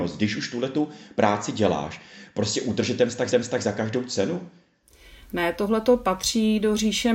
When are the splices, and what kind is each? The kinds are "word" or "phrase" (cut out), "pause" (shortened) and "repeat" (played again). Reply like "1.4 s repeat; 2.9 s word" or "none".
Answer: 3.3 s repeat